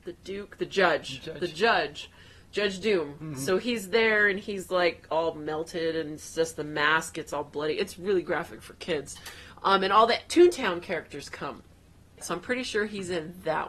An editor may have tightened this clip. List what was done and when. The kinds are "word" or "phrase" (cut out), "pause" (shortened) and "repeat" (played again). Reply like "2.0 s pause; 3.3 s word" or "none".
none